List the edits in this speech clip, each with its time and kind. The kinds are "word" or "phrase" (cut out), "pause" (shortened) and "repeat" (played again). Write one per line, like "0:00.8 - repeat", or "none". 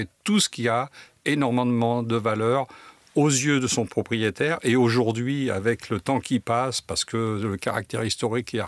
none

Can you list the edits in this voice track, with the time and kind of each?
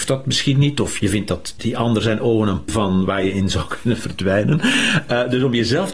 0:01.0 - word
0:01.6 - word
0:02.7 - word

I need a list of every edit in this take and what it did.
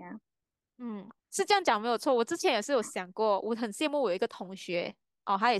0:01.2 - pause

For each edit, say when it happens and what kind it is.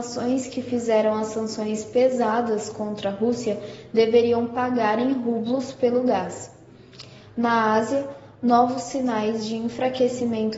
none

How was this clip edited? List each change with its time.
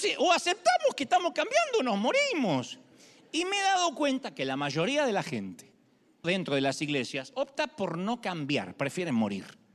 0:06.2 - word

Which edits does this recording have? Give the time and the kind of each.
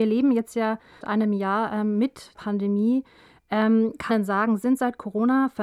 0:01.0 - word
0:02.4 - word
0:04.1 - word

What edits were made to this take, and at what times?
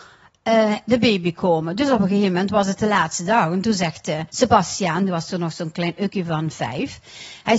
0:04.3 - pause

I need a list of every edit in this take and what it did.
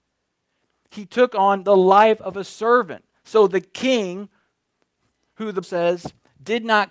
0:05.6 - word

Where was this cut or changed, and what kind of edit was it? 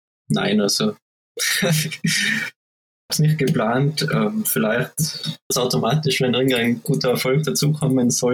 0:03.1 - word
0:05.5 - word

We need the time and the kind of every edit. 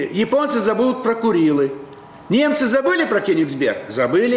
none

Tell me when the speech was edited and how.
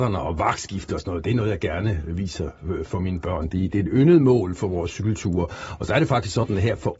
none

